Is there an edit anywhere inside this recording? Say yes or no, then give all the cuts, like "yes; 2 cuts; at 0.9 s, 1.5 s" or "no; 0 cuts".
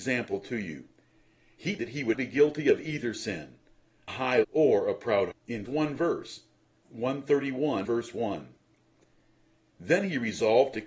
yes; 8 cuts; at 1.8 s, 2.1 s, 4.1 s, 4.4 s, 5.3 s, 5.7 s, 6.8 s, 7.8 s